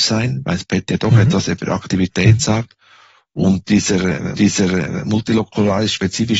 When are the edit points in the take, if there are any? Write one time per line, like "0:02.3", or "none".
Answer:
0:04.3